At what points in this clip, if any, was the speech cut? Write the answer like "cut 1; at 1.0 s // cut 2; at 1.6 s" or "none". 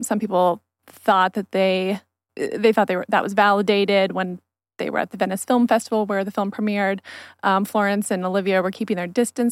none